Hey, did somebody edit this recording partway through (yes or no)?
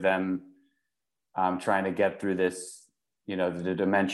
no